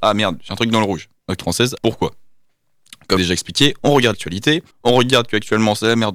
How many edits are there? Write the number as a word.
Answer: five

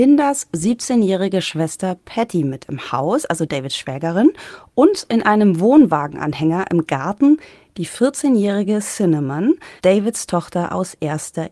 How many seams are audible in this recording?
one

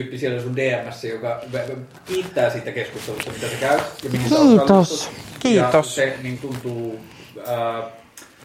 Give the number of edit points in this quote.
one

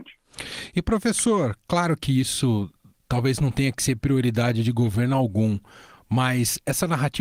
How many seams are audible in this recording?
zero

